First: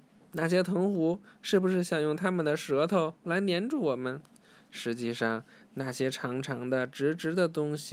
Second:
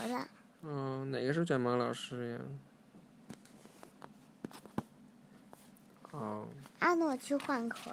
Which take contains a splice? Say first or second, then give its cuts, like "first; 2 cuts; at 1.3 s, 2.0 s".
second; 1 cut; at 6.7 s